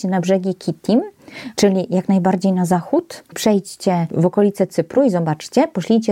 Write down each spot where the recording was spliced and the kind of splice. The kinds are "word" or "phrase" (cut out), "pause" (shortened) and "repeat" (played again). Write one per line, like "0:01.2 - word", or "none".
none